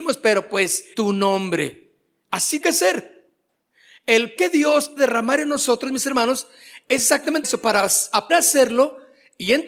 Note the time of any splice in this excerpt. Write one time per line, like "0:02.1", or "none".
0:00.9
0:02.6
0:04.4
0:05.0
0:07.4
0:08.3